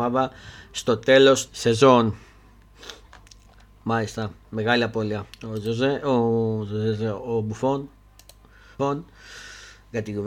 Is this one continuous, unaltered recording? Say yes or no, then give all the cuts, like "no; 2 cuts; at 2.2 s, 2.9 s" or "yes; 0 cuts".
no; 3 cuts; at 1.5 s, 5.3 s, 8.8 s